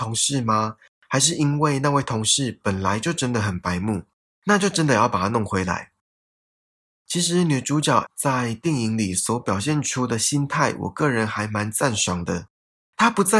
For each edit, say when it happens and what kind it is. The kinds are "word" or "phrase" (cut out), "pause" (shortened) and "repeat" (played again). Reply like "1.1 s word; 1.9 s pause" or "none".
8.1 s word